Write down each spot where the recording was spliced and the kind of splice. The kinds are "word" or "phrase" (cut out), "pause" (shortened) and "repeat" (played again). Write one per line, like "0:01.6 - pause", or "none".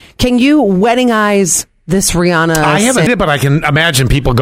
0:03.1 - word